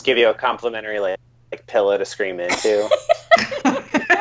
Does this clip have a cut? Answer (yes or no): no